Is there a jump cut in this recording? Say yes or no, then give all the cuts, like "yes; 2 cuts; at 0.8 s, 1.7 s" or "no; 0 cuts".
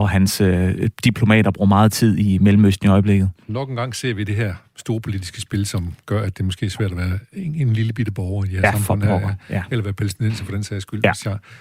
no; 0 cuts